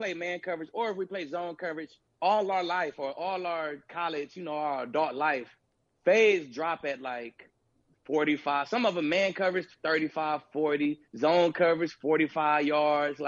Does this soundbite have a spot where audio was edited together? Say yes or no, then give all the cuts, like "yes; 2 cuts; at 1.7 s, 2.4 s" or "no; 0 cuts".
yes; 2 cuts; at 2.1 s, 11.1 s